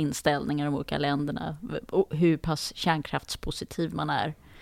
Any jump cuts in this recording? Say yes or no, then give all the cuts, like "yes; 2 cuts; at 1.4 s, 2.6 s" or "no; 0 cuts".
no; 0 cuts